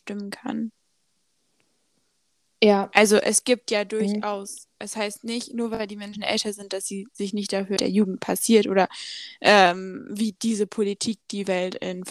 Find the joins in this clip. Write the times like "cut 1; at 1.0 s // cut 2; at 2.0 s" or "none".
cut 1; at 7.8 s